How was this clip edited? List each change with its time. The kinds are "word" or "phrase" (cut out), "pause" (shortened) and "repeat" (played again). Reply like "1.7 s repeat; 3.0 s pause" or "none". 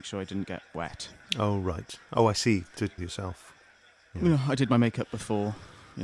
3.0 s word